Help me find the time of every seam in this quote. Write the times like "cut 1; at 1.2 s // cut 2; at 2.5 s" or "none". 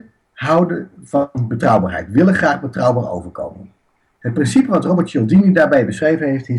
none